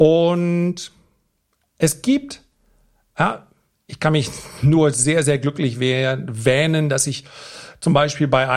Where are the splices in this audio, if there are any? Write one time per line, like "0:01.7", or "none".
none